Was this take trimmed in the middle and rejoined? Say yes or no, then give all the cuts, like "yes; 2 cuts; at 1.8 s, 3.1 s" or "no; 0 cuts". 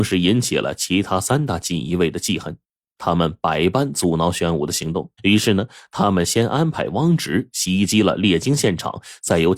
yes; 1 cut; at 5.2 s